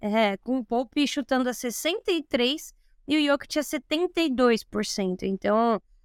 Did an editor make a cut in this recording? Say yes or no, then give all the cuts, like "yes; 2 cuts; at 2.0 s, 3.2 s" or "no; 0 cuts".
no; 0 cuts